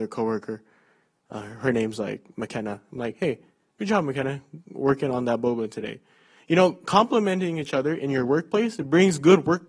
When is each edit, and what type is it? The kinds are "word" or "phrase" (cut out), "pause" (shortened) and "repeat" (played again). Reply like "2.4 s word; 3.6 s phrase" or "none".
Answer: none